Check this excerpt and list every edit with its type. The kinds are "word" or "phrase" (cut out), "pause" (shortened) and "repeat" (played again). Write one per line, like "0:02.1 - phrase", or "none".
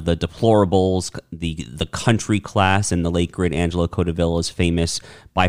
none